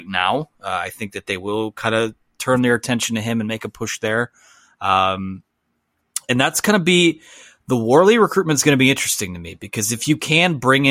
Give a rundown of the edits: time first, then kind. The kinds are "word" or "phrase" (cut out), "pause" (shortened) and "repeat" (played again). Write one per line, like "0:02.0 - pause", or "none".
none